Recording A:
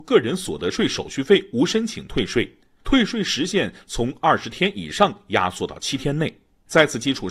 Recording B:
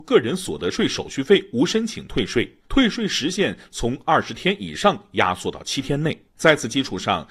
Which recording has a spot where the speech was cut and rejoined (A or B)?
B